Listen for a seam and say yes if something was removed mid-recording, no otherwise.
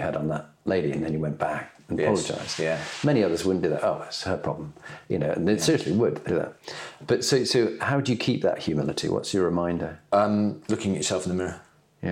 yes